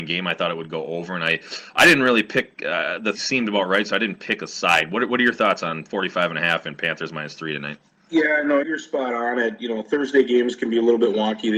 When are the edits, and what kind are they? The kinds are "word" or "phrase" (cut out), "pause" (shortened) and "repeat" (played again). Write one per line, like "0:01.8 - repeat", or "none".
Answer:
0:03.1 - word
0:07.9 - pause
0:08.6 - word